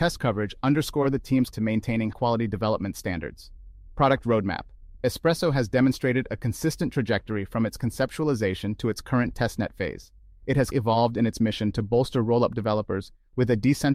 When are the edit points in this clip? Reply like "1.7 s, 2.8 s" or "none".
1.5 s, 2.1 s, 10.7 s